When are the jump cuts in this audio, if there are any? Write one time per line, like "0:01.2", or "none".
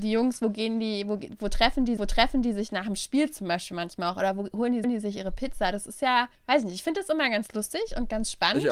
0:02.0
0:04.8
0:06.3